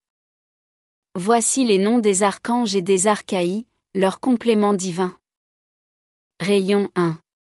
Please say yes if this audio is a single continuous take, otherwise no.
yes